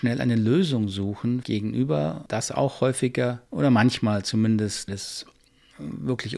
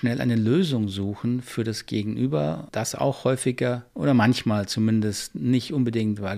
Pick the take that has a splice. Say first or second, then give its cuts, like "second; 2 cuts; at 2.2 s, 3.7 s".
first; 2 cuts; at 1.4 s, 4.9 s